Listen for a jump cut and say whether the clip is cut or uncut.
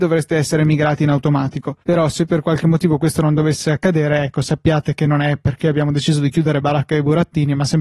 cut